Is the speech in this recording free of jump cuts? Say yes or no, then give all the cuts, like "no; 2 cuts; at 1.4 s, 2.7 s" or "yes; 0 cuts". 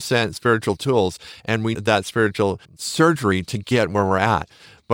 no; 2 cuts; at 1.7 s, 2.6 s